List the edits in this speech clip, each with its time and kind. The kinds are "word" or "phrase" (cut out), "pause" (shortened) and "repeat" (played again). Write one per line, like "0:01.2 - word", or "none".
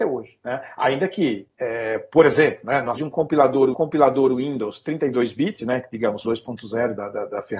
0:01.5 - pause
0:03.0 - word
0:03.7 - repeat
0:06.2 - phrase